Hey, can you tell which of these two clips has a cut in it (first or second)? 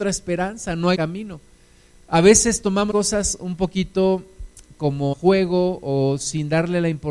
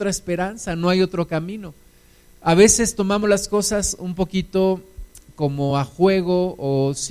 first